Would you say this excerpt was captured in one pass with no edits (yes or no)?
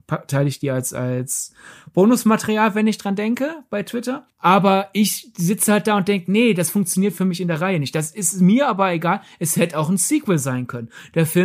yes